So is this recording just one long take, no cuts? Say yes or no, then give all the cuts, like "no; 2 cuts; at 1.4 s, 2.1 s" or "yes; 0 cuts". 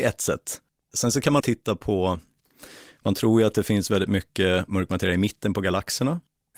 no; 1 cut; at 1.4 s